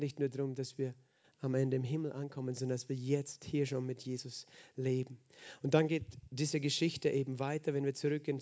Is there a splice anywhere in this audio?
no; 0 cuts

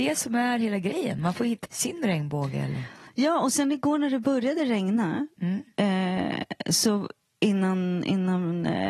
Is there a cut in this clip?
yes; 1 cut; at 1.6 s

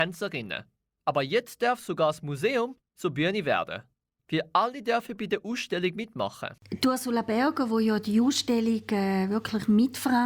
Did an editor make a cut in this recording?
no; 0 cuts

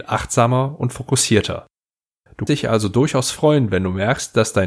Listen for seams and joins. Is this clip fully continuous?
no; 1 cut; at 2.5 s

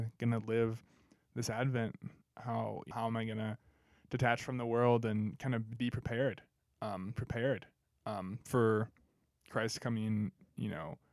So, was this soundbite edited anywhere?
yes; 4 cuts; at 2.2 s, 2.9 s, 5.8 s, 7.2 s

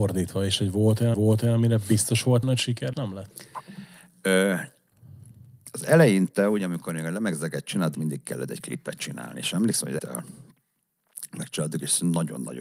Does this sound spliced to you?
yes; 5 cuts; at 1.1 s, 2.4 s, 2.9 s, 7.9 s, 10.0 s

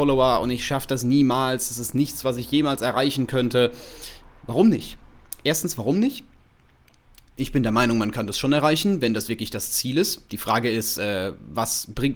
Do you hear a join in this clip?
no; 0 cuts

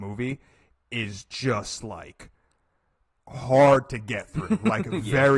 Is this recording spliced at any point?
no; 0 cuts

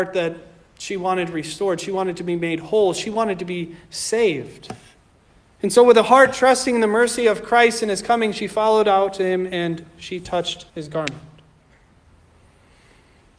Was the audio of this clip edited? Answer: yes; 1 cut; at 10.7 s

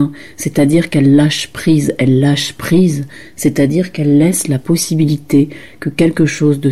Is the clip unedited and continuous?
yes; 0 cuts

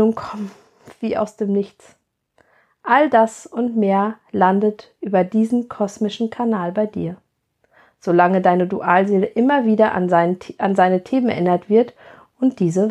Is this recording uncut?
yes; 0 cuts

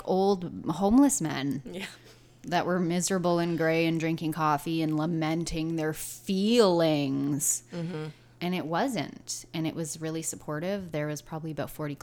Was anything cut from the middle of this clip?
no; 0 cuts

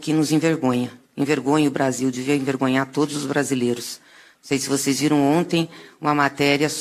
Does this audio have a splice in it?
no; 0 cuts

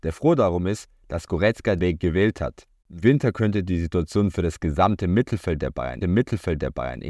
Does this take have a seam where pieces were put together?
yes; 2 cuts; at 1.8 s, 6.0 s

